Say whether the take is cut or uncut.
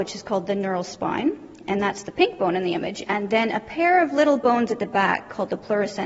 uncut